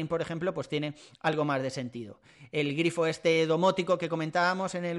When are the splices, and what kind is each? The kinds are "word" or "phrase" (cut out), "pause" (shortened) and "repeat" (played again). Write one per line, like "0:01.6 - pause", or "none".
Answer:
none

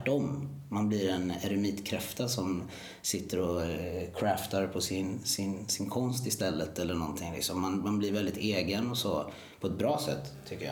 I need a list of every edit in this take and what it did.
none

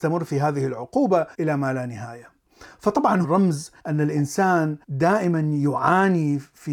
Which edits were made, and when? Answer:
0:01.3 - pause
0:03.2 - word
0:03.8 - pause
0:04.8 - pause

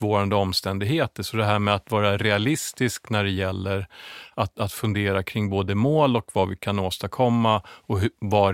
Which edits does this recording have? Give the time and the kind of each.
none

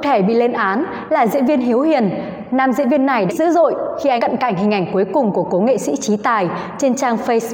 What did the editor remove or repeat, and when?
0:03.3 - phrase
0:04.2 - word

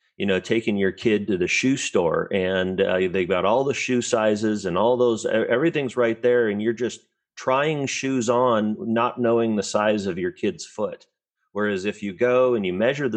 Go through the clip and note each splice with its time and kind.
none

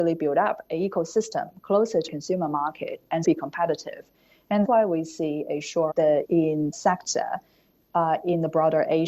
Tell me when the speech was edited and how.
0:02.1 - word
0:03.2 - word
0:04.6 - word
0:05.9 - word
0:06.2 - word
0:06.7 - word

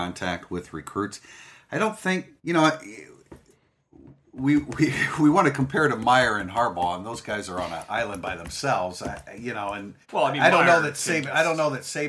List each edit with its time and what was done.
0:02.4 - pause
0:10.0 - pause

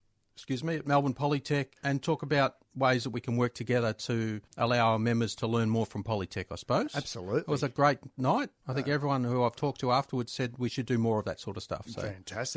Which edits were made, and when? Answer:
0:01.8 - pause
0:02.6 - pause
0:04.5 - pause
0:08.6 - pause

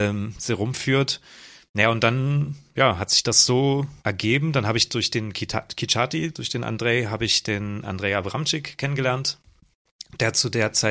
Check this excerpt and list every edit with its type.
0:04.0 - pause

